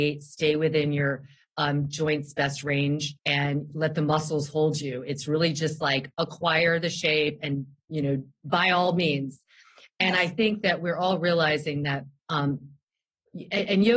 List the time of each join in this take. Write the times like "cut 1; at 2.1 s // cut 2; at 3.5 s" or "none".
cut 1; at 3.2 s // cut 2; at 12.2 s